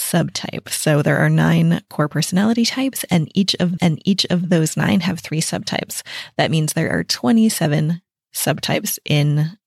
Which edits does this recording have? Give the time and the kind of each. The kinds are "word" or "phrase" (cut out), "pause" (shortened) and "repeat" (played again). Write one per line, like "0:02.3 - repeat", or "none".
0:03.8 - repeat